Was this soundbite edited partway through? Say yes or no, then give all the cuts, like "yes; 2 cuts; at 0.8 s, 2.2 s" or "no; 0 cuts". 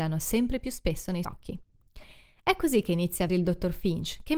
yes; 2 cuts; at 1.2 s, 3.3 s